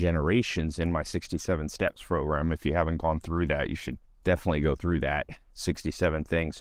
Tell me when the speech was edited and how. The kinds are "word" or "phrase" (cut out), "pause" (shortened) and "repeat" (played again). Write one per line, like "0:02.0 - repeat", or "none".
0:04.0 - pause
0:05.4 - pause